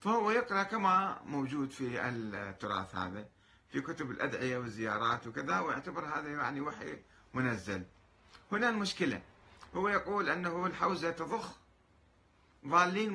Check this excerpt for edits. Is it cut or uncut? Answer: uncut